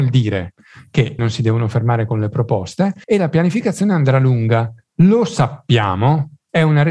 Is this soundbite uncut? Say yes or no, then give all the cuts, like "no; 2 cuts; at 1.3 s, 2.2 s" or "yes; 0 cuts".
no; 2 cuts; at 1.2 s, 3.0 s